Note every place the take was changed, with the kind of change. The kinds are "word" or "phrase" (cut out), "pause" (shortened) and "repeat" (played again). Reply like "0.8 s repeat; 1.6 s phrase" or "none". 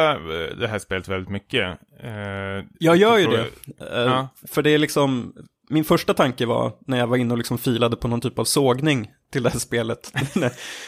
2.7 s pause